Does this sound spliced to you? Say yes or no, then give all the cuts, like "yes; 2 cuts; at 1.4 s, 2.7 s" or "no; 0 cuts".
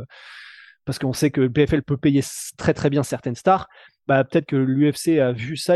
no; 0 cuts